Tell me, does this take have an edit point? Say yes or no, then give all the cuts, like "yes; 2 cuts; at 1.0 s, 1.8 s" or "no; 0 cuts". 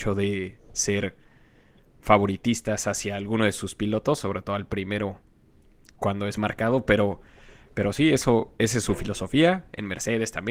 yes; 1 cut; at 6.4 s